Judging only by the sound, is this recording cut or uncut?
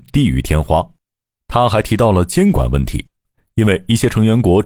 uncut